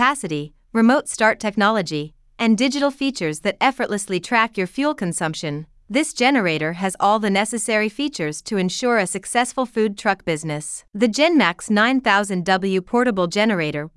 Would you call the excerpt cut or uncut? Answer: cut